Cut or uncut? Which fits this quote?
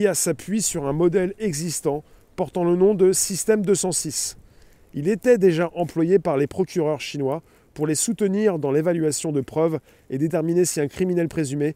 uncut